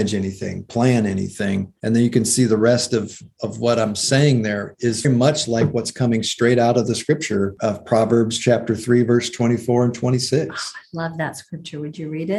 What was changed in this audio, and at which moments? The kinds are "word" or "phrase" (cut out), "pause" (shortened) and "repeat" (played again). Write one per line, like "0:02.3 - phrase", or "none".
0:05.0 - word